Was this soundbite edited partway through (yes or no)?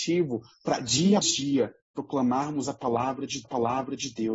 yes